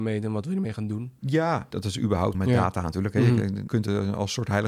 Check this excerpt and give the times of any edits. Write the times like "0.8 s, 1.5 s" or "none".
1.7 s, 2.3 s, 3.7 s